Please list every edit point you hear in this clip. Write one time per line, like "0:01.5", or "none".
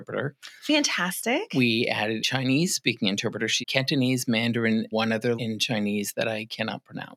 0:02.2
0:03.6
0:04.9
0:05.4